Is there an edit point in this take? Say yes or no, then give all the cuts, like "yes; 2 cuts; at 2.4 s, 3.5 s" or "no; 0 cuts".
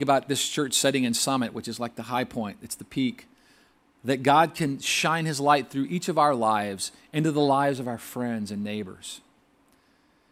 no; 0 cuts